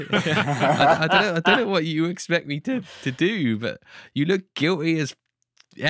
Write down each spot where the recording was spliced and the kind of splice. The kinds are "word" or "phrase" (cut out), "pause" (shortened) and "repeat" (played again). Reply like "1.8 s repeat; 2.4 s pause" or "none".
none